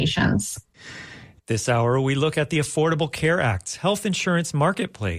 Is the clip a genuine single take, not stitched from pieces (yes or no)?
yes